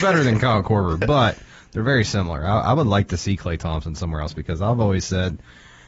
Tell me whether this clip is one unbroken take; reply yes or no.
yes